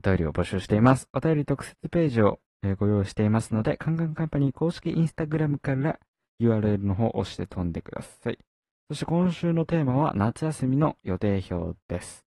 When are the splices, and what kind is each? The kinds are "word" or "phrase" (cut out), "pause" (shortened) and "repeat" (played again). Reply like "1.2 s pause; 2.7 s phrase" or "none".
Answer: none

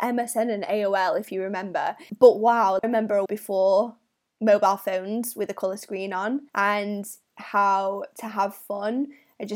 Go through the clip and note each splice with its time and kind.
2.8 s word; 3.3 s word; 6.5 s pause

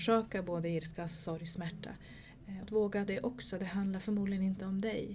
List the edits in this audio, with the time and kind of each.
2.6 s word; 3.1 s word

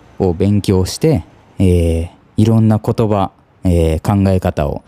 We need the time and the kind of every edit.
none

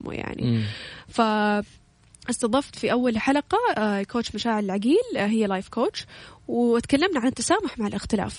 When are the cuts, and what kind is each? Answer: none

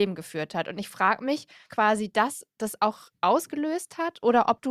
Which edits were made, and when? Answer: 1.7 s word

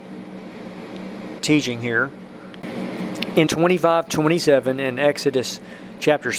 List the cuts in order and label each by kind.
1.4 s word; 3.5 s word; 4.1 s word

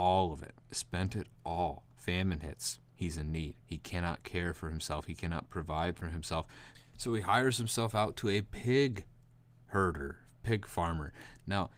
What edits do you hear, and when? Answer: 1.9 s pause; 2.9 s pause; 3.6 s pause

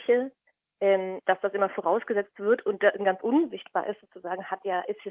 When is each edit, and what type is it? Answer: 3.0 s word

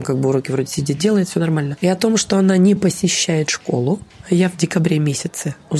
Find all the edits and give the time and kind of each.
none

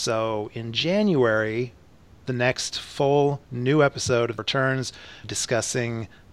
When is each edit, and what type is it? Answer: 3.4 s pause; 4.4 s word; 5.2 s phrase

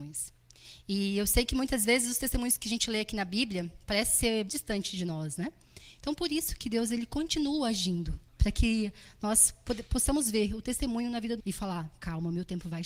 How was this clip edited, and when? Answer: 4.5 s word; 8.3 s pause; 11.4 s phrase

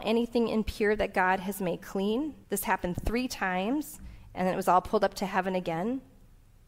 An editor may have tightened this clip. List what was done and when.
2.4 s pause

